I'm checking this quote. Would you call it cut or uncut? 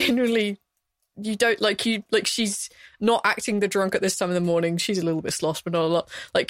uncut